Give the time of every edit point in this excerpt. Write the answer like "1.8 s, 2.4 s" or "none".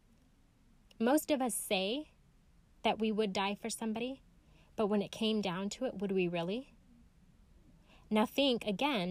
none